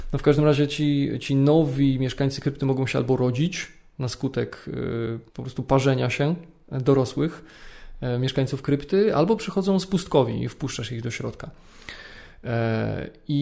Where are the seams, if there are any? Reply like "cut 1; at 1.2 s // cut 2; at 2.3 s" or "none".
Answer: cut 1; at 5.3 s

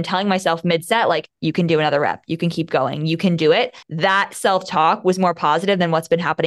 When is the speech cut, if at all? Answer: cut 1; at 1.3 s // cut 2; at 3.8 s

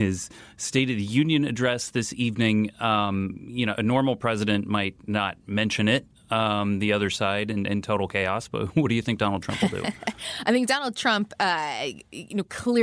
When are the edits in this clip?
none

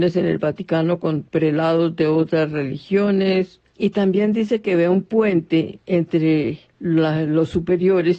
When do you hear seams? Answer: cut 1; at 3.7 s // cut 2; at 6.7 s

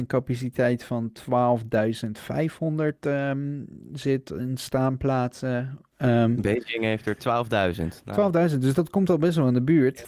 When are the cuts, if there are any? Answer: none

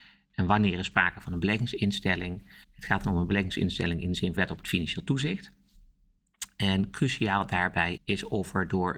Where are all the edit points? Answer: cut 1; at 2.6 s // cut 2; at 4.4 s // cut 3; at 8.0 s

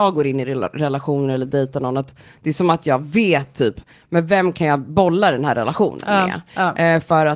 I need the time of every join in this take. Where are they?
none

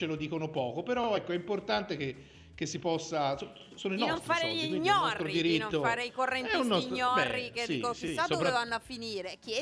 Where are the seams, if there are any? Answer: none

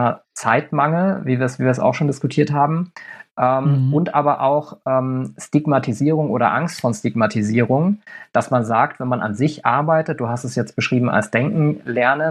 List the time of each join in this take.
none

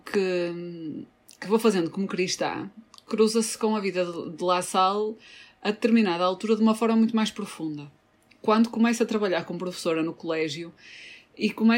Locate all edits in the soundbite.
none

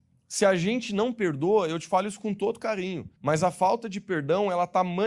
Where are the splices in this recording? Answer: cut 1; at 3.2 s

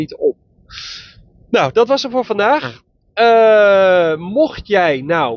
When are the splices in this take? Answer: none

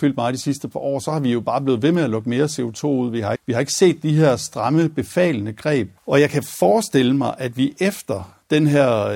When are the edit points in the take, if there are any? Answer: cut 1; at 3.4 s // cut 2; at 6.0 s

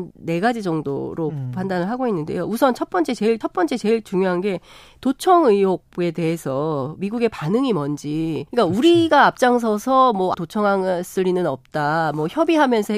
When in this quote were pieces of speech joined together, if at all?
cut 1; at 3.4 s // cut 2; at 5.9 s // cut 3; at 8.5 s // cut 4; at 10.3 s

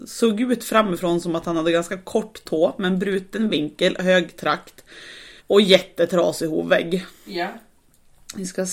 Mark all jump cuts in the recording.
cut 1; at 5.4 s

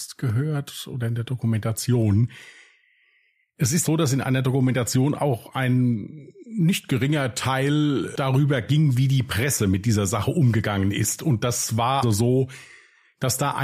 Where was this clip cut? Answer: cut 1; at 3.8 s // cut 2; at 12.0 s

